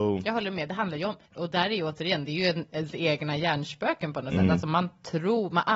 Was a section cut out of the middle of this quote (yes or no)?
yes